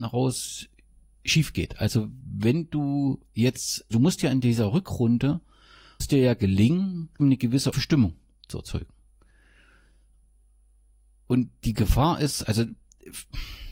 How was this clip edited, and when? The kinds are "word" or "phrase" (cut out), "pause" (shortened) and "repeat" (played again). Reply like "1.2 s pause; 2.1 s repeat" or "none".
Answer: 3.9 s word; 6.0 s word; 7.2 s word; 7.7 s word